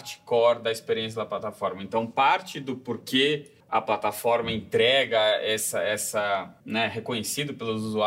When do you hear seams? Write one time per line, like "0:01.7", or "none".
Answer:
0:03.6
0:06.6